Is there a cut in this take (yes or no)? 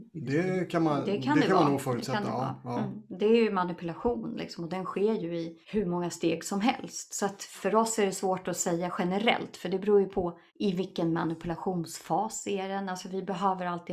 yes